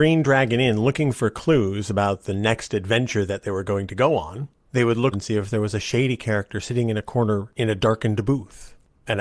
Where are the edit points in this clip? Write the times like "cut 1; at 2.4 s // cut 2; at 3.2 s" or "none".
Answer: cut 1; at 5.1 s

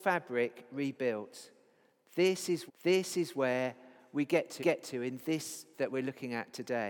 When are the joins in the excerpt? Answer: cut 1; at 2.7 s // cut 2; at 4.6 s // cut 3; at 5.7 s

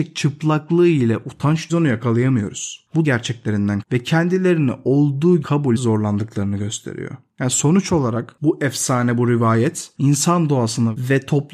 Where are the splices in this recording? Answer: cut 1; at 1.7 s // cut 2; at 3.0 s // cut 3; at 3.8 s // cut 4; at 5.4 s // cut 5; at 5.8 s

